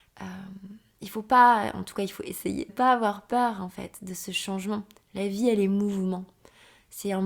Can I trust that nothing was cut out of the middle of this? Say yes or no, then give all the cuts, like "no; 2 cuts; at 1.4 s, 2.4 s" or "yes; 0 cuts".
no; 1 cut; at 2.7 s